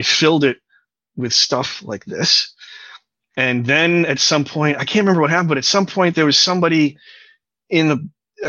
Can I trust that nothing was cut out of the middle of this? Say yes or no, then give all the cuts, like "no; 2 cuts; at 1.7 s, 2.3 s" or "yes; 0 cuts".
yes; 0 cuts